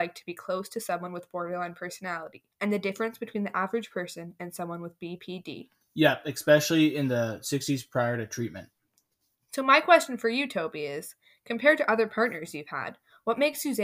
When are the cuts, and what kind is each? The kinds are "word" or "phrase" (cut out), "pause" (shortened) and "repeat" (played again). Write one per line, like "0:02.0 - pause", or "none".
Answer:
0:02.5 - pause